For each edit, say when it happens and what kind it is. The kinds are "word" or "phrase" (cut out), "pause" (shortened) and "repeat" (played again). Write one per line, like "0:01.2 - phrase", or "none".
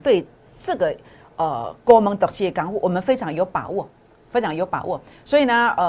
none